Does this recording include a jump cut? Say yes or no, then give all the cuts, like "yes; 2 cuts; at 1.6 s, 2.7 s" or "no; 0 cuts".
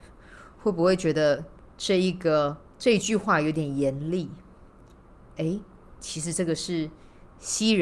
yes; 1 cut; at 2.7 s